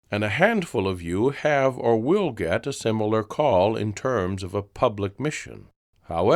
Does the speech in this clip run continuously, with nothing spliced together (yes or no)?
yes